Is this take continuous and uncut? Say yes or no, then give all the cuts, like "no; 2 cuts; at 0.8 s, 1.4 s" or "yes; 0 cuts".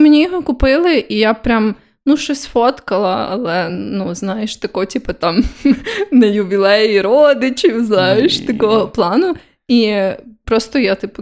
yes; 0 cuts